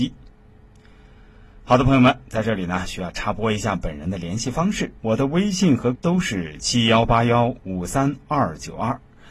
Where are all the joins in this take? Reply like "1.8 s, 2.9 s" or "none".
5.0 s, 5.9 s